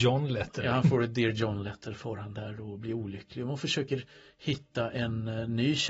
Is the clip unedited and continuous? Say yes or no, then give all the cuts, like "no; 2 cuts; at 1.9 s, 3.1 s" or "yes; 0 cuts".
yes; 0 cuts